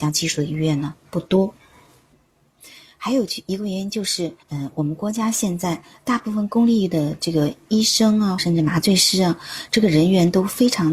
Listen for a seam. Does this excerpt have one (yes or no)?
yes